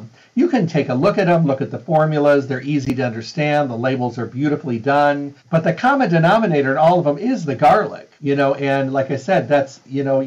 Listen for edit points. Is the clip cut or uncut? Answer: cut